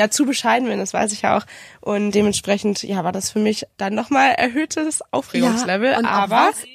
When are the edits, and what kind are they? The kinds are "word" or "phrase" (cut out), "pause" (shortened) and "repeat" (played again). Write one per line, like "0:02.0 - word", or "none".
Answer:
0:02.1 - word
0:03.8 - word